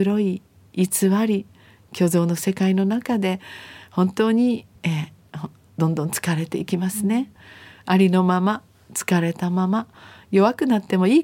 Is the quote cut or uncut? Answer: uncut